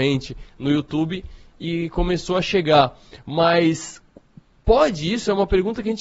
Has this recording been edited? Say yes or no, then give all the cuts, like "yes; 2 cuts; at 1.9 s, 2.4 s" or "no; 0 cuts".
no; 0 cuts